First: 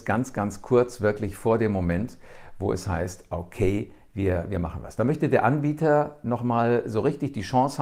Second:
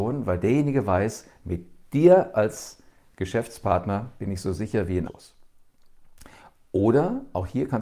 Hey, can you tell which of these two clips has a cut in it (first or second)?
second